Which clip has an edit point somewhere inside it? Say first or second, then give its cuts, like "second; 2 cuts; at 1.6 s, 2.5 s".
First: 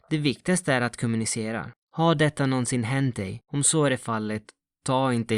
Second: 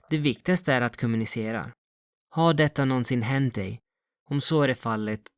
first; 2 cuts; at 1.8 s, 3.4 s